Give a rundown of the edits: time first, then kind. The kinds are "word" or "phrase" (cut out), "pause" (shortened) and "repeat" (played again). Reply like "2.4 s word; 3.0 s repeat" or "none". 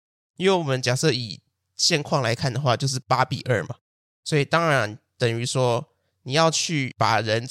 none